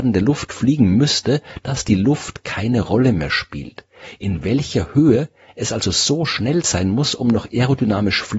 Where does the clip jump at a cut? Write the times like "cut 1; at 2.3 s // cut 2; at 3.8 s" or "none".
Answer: none